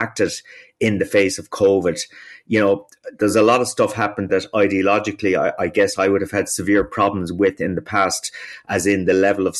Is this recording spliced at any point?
yes; 1 cut; at 4.3 s

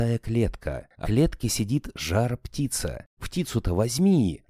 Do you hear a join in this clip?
yes; 2 cuts; at 1.0 s, 3.2 s

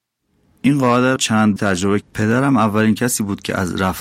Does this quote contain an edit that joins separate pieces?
yes; 3 cuts; at 1.2 s, 1.6 s, 2.0 s

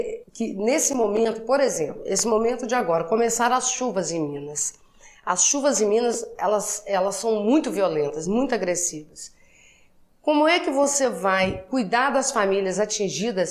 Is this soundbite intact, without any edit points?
yes; 0 cuts

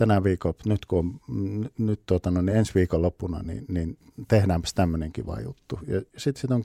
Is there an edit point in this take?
no; 0 cuts

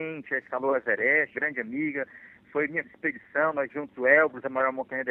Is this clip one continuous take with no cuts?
no; 3 cuts; at 1.3 s, 2.8 s, 3.7 s

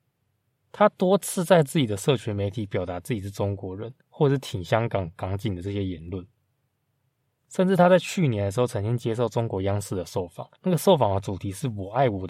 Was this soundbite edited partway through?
yes; 2 cuts; at 4.0 s, 10.6 s

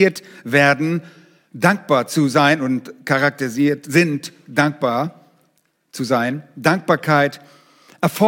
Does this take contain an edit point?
no; 0 cuts

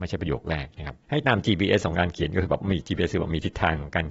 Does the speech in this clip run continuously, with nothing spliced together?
no; 1 cut; at 1.0 s

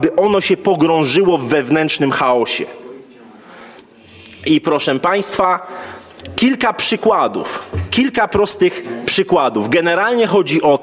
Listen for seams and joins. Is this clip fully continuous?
yes; 0 cuts

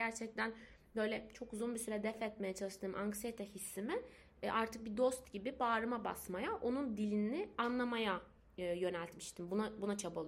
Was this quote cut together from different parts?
no; 0 cuts

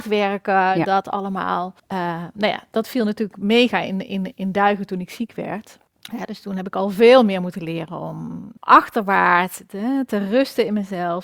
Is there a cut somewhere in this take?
yes; 3 cuts; at 1.8 s, 5.9 s, 8.6 s

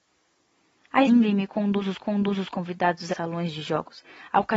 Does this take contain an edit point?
yes; 3 cuts; at 1.1 s, 2.0 s, 3.1 s

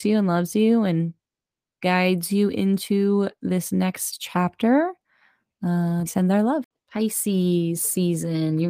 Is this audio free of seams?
no; 1 cut; at 6.1 s

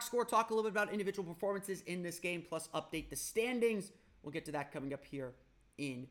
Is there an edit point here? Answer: no; 0 cuts

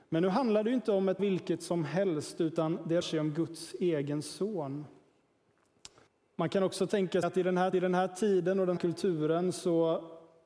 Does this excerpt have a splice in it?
yes; 6 cuts; at 1.2 s, 3.0 s, 6.1 s, 7.2 s, 7.7 s, 8.8 s

